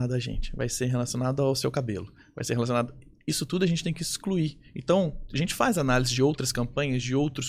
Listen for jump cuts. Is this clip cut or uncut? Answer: uncut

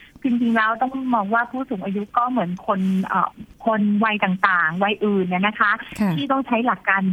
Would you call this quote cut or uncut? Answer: cut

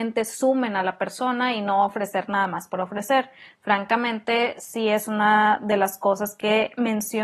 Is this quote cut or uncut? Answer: uncut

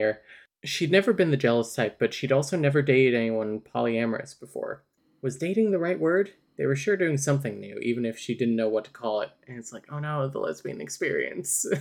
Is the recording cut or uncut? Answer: uncut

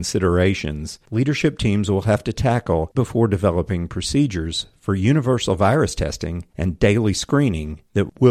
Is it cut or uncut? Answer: cut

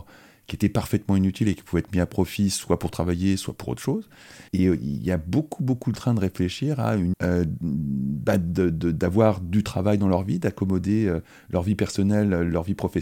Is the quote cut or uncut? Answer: cut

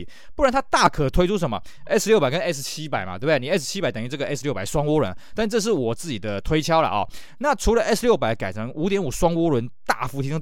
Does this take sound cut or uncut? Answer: uncut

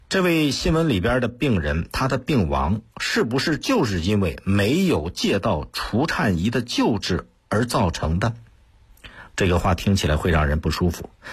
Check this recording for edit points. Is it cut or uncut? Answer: uncut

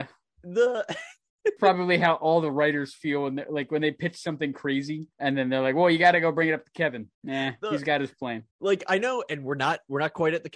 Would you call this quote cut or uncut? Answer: cut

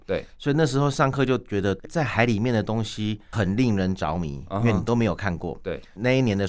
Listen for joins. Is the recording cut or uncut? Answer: cut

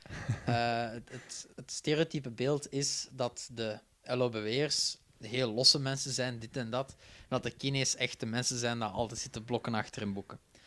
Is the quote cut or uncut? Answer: cut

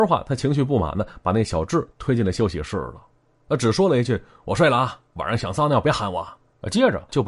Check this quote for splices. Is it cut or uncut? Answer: uncut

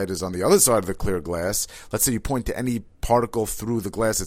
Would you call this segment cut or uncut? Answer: uncut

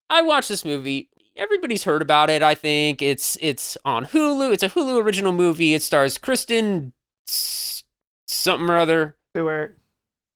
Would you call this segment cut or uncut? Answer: uncut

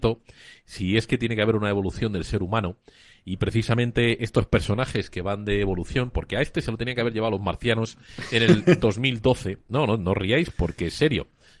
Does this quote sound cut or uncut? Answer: uncut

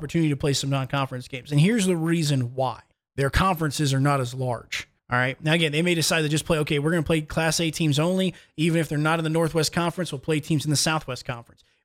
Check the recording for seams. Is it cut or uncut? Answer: cut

